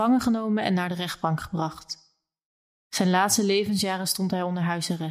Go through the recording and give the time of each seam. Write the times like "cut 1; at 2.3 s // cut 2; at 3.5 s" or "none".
none